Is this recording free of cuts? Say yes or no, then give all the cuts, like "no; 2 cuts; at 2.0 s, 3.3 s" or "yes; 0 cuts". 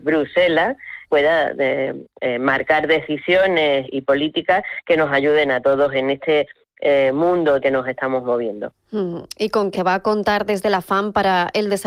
no; 4 cuts; at 1.1 s, 3.9 s, 7.6 s, 9.7 s